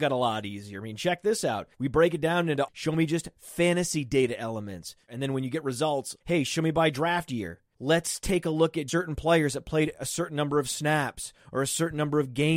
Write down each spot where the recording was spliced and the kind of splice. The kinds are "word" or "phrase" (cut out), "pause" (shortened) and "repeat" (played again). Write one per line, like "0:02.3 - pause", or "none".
0:01.7 - pause
0:02.7 - phrase
0:08.9 - word